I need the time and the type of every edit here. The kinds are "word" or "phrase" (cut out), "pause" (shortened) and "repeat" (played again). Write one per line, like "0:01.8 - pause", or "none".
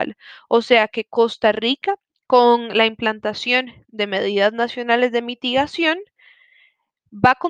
0:02.1 - pause

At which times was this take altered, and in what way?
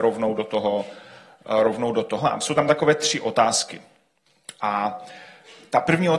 none

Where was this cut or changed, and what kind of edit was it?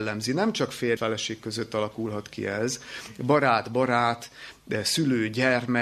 0:01.0 - word

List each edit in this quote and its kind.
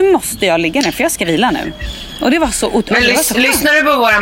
none

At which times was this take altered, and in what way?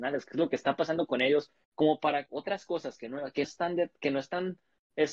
0:02.3 - word
0:03.4 - word

